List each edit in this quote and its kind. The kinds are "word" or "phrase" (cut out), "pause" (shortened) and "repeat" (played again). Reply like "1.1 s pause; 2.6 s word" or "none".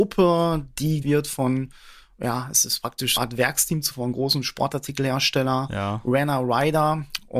1.0 s word; 3.2 s word; 3.9 s word